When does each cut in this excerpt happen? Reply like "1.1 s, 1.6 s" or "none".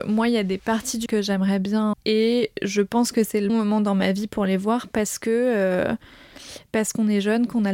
1.1 s, 1.9 s, 3.5 s